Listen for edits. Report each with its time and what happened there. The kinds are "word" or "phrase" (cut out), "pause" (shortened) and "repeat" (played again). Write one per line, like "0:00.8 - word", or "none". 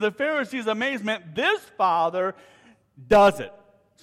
none